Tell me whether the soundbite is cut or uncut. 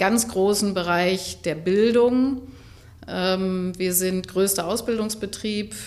uncut